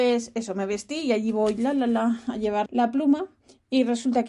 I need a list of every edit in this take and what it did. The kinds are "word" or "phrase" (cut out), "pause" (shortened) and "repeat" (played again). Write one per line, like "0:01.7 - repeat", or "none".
0:02.7 - word